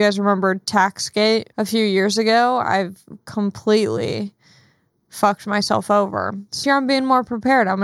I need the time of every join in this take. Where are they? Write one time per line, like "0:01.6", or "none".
0:01.5
0:06.6